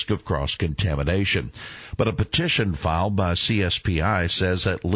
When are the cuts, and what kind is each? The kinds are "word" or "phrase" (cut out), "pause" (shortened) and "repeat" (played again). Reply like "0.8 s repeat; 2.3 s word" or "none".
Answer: none

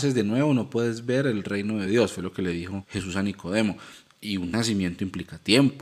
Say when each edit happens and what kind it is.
none

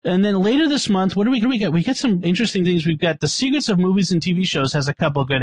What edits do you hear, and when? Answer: 1.4 s repeat; 2.2 s word

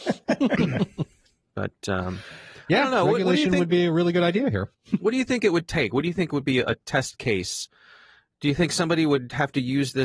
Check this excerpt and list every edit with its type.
4.7 s pause

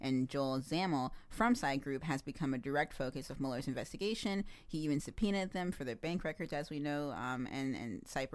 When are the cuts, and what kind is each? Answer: none

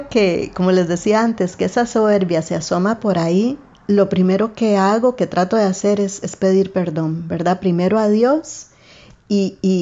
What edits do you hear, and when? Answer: 3.7 s pause

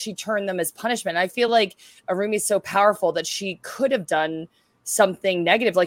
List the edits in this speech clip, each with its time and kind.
none

